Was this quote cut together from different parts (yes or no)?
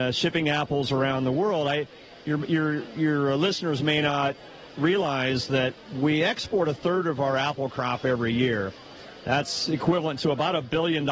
no